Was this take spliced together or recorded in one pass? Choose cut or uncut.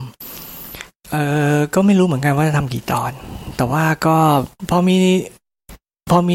uncut